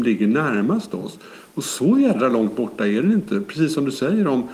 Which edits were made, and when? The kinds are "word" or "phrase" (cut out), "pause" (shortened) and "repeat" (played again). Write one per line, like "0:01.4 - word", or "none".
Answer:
none